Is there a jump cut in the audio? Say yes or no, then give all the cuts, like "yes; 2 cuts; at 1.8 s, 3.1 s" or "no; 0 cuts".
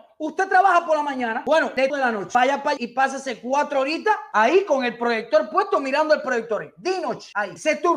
yes; 2 cuts; at 1.9 s, 2.8 s